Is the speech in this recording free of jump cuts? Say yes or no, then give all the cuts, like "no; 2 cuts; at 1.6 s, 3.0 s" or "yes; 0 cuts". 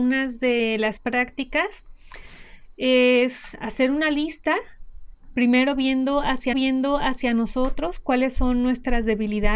no; 2 cuts; at 1.0 s, 6.5 s